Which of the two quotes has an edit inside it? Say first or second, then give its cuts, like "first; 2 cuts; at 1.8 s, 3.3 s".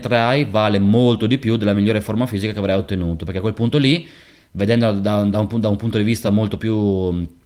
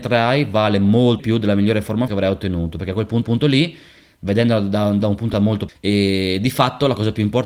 second; 6 cuts; at 1.2 s, 2.1 s, 3.2 s, 5.0 s, 5.3 s, 5.7 s